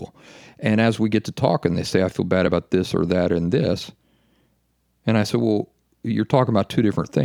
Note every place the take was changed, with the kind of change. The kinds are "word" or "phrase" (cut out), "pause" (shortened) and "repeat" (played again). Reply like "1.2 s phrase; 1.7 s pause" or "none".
none